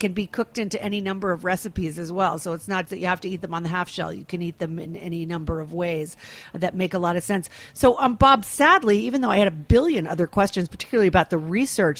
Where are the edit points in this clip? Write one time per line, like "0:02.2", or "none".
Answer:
0:02.9